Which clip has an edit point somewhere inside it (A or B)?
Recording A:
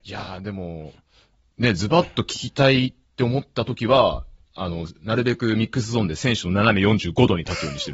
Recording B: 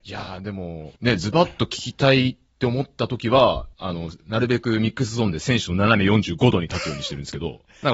B